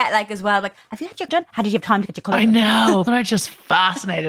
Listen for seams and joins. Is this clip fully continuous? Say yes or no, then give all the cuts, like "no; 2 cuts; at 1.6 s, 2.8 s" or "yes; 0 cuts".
no; 2 cuts; at 1.3 s, 3.1 s